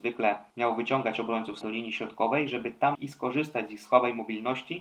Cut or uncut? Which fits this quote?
cut